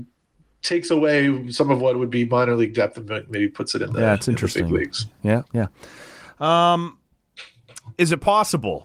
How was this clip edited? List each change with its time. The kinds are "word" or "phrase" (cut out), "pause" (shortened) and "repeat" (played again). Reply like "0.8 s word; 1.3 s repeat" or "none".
5.5 s pause